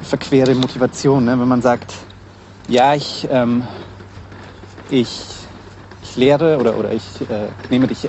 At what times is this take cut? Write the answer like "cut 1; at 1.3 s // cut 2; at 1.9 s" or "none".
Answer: none

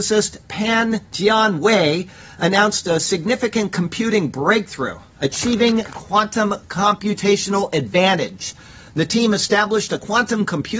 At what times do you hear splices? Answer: none

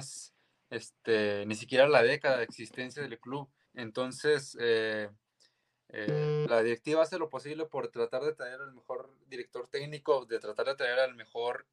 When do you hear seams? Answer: cut 1; at 3.7 s

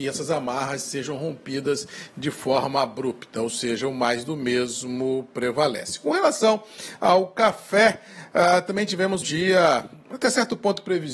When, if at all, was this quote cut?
cut 1; at 9.2 s

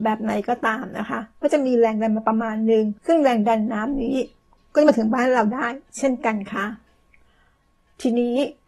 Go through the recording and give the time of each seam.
cut 1; at 3.0 s

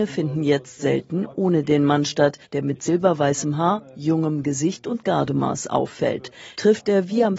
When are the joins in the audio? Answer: cut 1; at 2.4 s

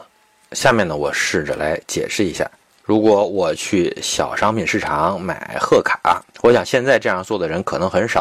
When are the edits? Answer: cut 1; at 6.3 s

